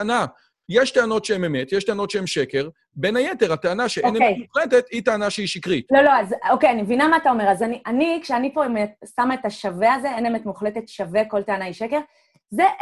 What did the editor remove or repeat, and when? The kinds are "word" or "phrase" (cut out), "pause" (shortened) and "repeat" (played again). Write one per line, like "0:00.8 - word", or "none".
none